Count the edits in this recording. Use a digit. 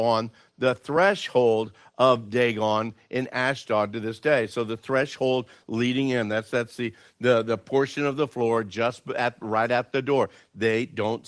0